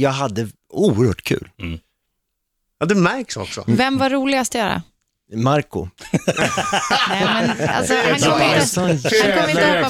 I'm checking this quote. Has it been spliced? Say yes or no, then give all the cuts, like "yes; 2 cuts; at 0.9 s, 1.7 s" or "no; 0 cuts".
no; 0 cuts